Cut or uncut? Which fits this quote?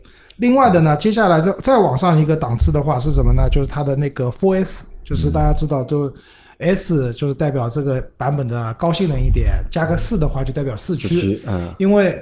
uncut